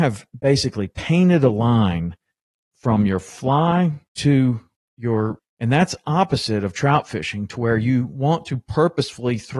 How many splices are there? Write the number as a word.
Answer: one